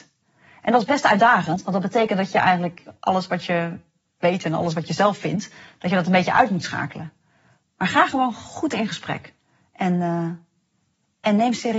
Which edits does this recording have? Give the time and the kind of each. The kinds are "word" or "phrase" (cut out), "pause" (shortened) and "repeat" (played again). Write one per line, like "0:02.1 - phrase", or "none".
none